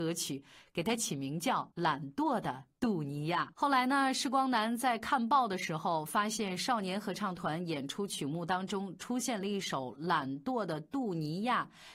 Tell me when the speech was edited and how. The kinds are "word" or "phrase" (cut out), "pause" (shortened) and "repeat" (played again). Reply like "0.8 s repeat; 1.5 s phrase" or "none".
1.7 s pause; 3.5 s pause